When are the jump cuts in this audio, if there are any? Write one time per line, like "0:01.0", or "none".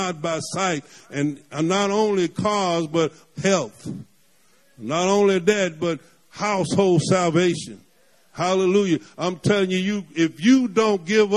none

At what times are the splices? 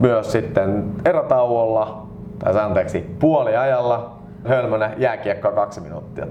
0:04.4

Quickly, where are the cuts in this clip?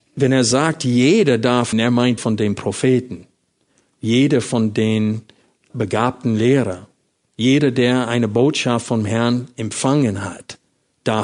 0:01.7
0:02.2
0:05.7

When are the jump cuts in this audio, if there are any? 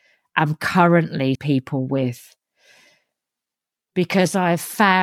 0:01.3

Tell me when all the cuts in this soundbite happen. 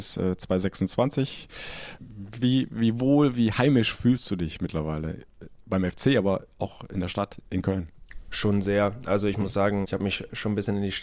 0:07.4
0:09.8

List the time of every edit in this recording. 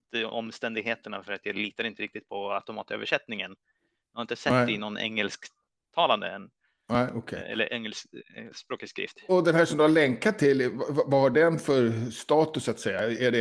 none

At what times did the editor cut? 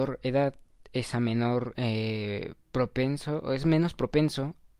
none

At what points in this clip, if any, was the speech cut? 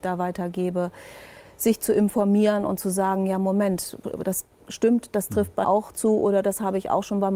0:05.6

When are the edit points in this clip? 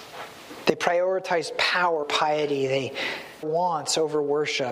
0:02.0
0:03.4

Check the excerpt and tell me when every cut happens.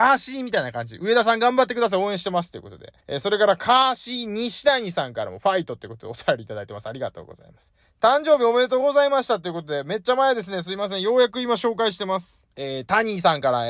0:03.0
0:07.8
0:12.5

